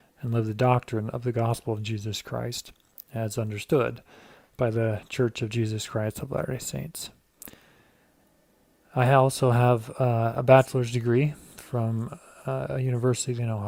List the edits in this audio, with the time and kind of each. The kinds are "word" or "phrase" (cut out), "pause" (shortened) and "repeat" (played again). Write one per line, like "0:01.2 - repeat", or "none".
none